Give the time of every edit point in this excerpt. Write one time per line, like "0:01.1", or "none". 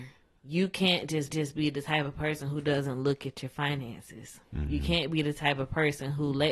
0:01.3